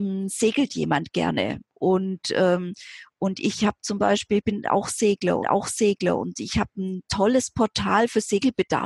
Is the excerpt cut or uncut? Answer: cut